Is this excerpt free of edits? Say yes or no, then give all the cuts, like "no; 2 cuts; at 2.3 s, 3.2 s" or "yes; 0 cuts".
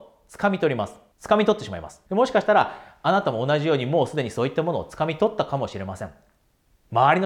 no; 2 cuts; at 1.1 s, 2.1 s